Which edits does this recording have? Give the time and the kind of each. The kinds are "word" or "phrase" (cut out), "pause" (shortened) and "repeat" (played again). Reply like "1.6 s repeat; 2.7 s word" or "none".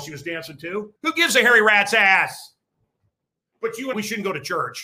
1.0 s pause; 3.9 s word